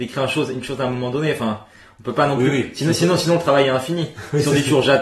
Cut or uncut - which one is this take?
uncut